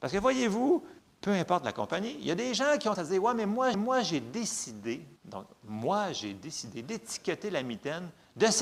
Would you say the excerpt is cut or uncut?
cut